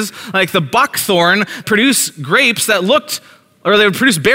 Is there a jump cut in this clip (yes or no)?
yes